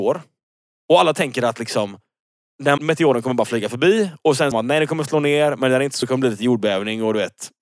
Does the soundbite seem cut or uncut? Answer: cut